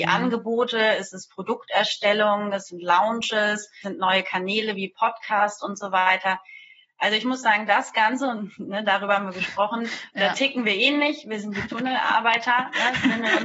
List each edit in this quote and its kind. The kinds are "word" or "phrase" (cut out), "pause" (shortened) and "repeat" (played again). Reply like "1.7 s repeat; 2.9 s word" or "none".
3.8 s word

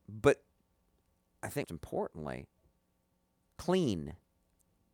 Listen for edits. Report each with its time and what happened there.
1.6 s word

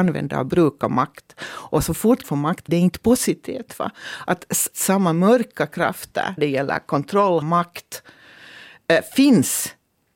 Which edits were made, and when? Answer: 2.2 s word; 2.7 s word; 4.7 s word; 6.4 s word; 7.4 s word

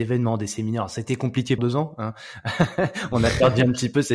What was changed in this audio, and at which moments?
1.6 s word

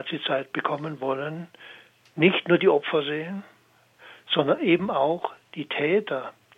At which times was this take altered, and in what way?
none

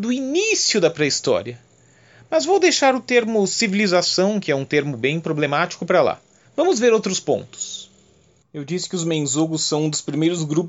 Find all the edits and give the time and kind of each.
6.4 s pause

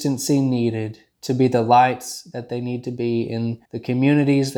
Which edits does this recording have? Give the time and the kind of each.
1.1 s pause; 3.6 s pause

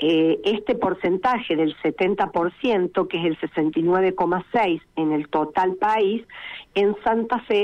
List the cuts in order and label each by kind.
none

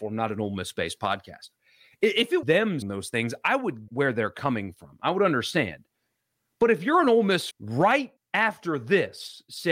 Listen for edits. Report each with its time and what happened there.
2.4 s word; 2.8 s word; 3.9 s word; 7.5 s word; 8.2 s word

